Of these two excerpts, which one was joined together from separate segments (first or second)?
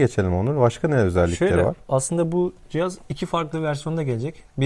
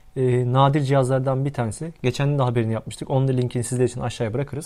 first